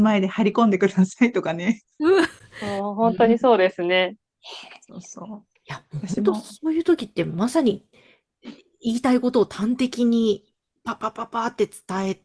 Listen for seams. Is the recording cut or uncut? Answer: cut